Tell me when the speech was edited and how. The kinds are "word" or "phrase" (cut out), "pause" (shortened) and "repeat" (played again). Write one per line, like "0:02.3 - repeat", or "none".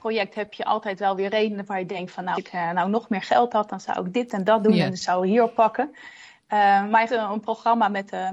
0:02.3 - word
0:07.1 - phrase